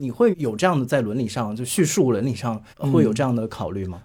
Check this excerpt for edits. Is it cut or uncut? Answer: cut